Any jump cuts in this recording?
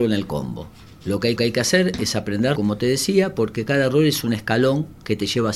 yes; 2 cuts; at 1.4 s, 2.5 s

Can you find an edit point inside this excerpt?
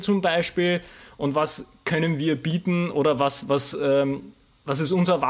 no; 0 cuts

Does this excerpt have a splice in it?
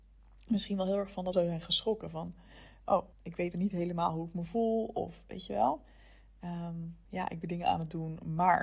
yes; 5 cuts; at 1.3 s, 3.1 s, 3.5 s, 7.0 s, 7.4 s

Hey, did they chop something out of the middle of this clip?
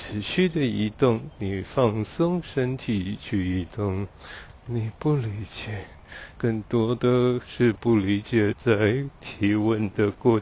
yes; 1 cut; at 6.3 s

